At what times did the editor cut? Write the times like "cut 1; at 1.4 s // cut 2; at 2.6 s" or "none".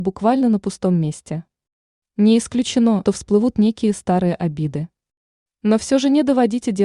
cut 1; at 3.1 s